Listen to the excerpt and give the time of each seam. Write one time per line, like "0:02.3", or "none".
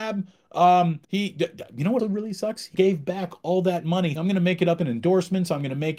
0:01.0
0:02.0
0:02.7
0:04.2